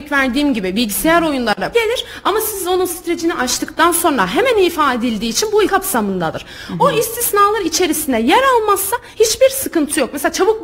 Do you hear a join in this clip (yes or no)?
yes